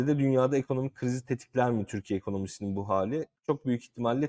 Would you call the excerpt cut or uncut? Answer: uncut